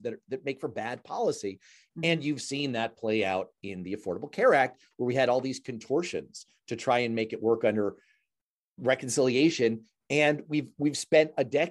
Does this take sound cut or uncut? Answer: uncut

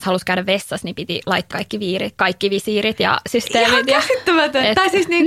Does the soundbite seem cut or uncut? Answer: cut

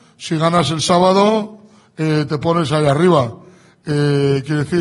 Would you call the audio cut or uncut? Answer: uncut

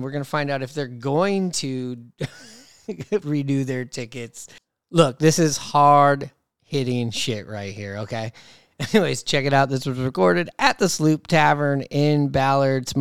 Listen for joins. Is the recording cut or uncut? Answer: uncut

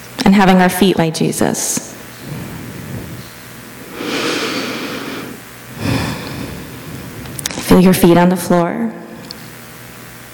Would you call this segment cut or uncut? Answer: cut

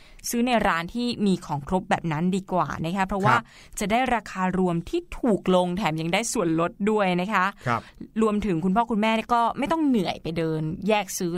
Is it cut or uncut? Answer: uncut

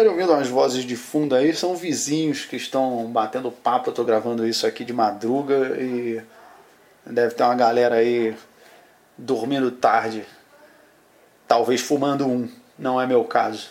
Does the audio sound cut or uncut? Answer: uncut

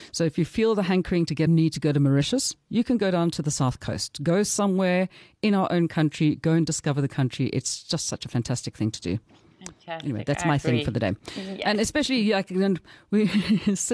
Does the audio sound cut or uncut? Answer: cut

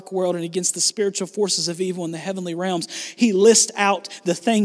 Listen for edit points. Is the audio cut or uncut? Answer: uncut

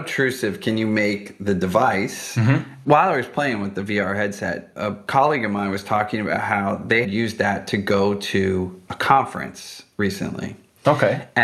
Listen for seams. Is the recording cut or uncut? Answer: cut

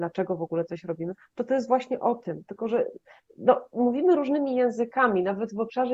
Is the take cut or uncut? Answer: uncut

